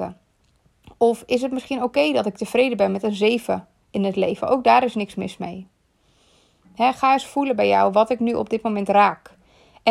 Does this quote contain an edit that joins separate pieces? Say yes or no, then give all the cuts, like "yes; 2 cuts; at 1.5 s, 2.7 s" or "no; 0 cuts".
no; 0 cuts